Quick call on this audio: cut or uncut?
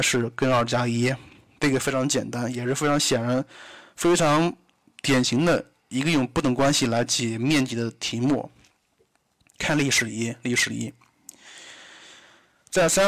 uncut